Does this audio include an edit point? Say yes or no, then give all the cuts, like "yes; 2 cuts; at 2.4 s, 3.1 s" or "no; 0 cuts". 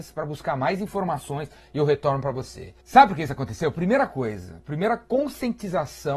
yes; 1 cut; at 2.8 s